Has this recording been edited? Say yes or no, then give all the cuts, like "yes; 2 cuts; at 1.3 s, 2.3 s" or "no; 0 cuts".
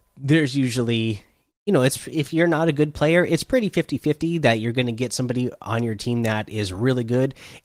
no; 0 cuts